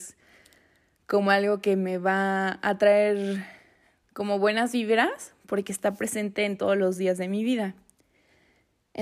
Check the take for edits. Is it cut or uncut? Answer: uncut